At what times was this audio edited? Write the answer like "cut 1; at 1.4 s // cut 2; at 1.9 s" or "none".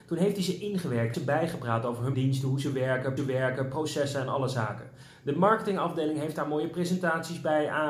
cut 1; at 1.1 s // cut 2; at 2.1 s // cut 3; at 3.2 s

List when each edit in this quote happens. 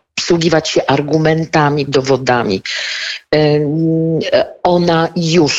cut 1; at 1.9 s

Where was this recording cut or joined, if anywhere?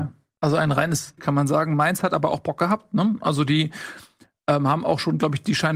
cut 1; at 1.2 s

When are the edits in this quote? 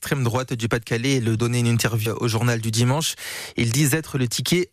cut 1; at 1.4 s // cut 2; at 2.1 s

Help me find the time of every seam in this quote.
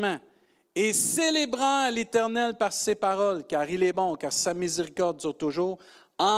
none

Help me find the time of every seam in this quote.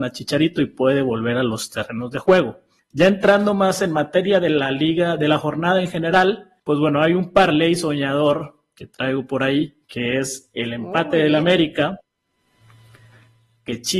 cut 1; at 2.8 s // cut 2; at 6.6 s // cut 3; at 9.8 s

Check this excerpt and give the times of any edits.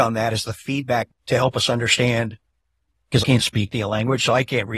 cut 1; at 1.1 s // cut 2; at 3.2 s

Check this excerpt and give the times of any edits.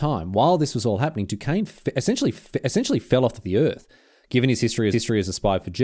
cut 1; at 2.3 s // cut 2; at 3.4 s // cut 3; at 4.9 s

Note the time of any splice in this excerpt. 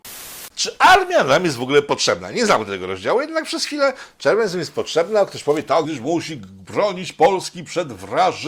cut 1; at 5.8 s

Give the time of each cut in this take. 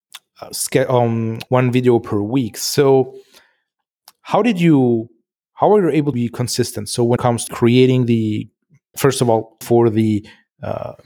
cut 1; at 1.5 s // cut 2; at 6.1 s // cut 3; at 7.2 s // cut 4; at 7.5 s // cut 5; at 8.9 s // cut 6; at 9.6 s

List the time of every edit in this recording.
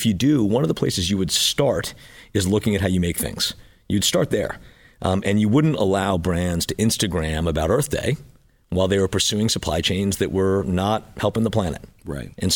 none

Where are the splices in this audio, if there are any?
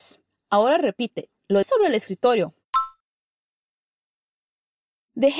cut 1; at 1.6 s

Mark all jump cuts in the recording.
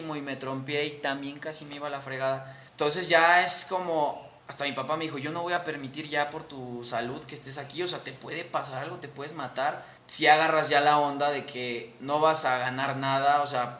cut 1; at 2.7 s // cut 2; at 4.4 s // cut 3; at 10.0 s

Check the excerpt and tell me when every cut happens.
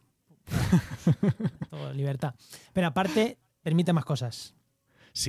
none

